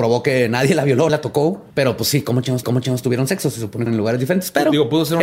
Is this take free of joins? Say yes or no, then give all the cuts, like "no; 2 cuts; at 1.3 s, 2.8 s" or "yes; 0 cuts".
no; 4 cuts; at 1.1 s, 1.7 s, 2.6 s, 3.9 s